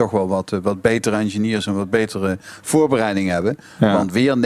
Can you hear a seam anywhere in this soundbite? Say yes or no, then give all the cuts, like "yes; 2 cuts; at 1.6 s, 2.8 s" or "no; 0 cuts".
no; 0 cuts